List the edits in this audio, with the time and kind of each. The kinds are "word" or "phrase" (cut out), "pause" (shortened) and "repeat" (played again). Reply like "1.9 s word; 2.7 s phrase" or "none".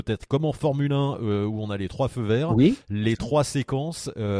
none